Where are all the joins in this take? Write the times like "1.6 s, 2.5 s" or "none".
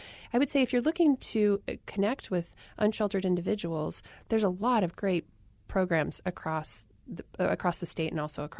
none

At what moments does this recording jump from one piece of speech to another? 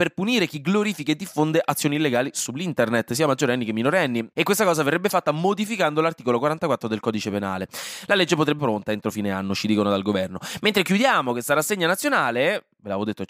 8.6 s

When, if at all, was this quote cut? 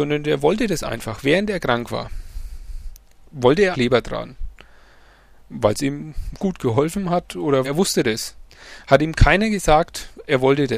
3.7 s, 7.6 s

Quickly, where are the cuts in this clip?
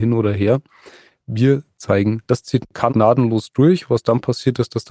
2.3 s, 2.9 s

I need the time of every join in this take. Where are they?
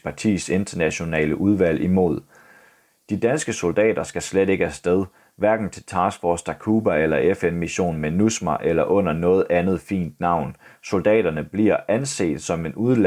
none

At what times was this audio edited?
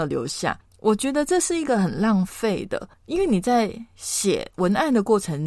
2.9 s

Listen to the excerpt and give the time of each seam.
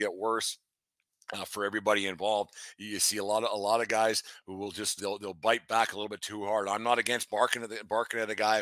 5.0 s

